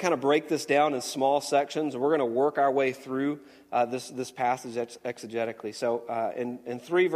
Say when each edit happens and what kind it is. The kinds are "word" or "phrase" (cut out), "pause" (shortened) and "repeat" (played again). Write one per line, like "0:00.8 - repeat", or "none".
none